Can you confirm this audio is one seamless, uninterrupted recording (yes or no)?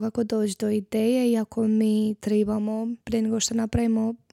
no